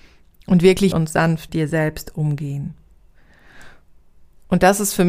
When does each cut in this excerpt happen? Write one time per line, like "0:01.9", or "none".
0:00.9
0:01.5